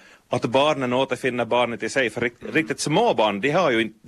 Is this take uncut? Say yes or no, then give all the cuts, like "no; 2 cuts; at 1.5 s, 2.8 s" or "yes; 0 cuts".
yes; 0 cuts